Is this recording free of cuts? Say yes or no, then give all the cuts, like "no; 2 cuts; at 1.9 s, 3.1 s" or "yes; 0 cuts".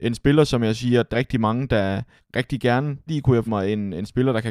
no; 4 cuts; at 1.1 s, 2.2 s, 3.1 s, 3.5 s